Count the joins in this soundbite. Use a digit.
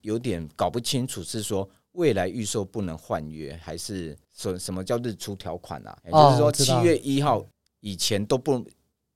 3